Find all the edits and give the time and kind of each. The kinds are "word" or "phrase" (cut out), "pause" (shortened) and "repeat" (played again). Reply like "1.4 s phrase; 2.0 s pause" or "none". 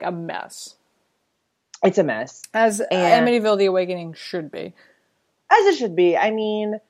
none